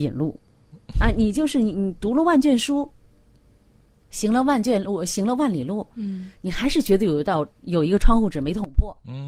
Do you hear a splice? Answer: no; 0 cuts

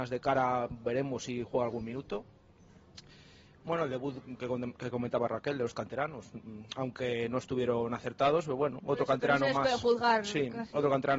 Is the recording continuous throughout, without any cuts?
yes; 0 cuts

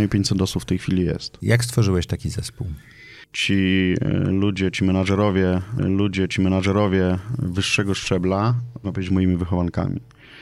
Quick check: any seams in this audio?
yes; 2 cuts; at 5.8 s, 8.8 s

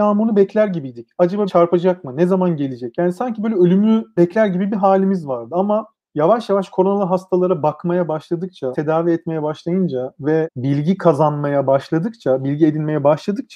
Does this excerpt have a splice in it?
yes; 3 cuts; at 1.5 s, 5.9 s, 8.7 s

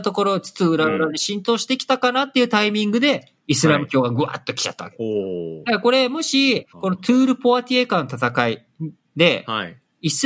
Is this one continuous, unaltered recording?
no; 2 cuts; at 3.4 s, 6.7 s

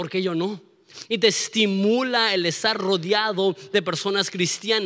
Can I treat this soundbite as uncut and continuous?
yes; 0 cuts

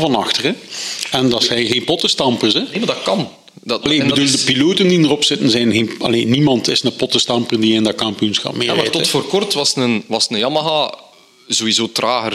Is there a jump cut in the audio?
no; 0 cuts

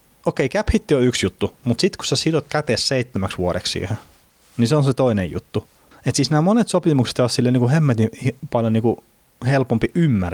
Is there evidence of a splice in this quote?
no; 0 cuts

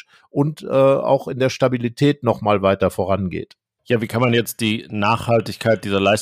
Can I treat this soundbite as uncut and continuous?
yes; 0 cuts

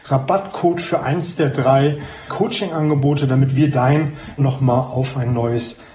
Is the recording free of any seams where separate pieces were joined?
no; 2 cuts; at 2.3 s, 4.4 s

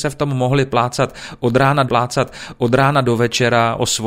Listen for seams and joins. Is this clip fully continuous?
no; 1 cut; at 1.9 s

